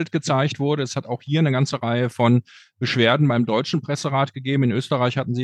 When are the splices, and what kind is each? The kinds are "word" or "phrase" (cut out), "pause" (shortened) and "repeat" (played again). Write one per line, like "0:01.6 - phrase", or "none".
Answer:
none